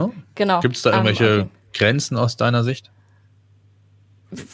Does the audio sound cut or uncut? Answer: uncut